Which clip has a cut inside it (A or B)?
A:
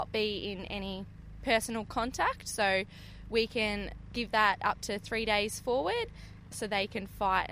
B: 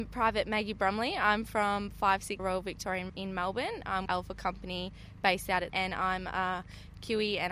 B